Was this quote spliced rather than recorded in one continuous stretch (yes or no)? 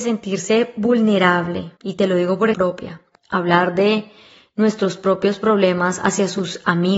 yes